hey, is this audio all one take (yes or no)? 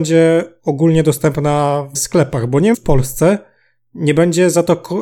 no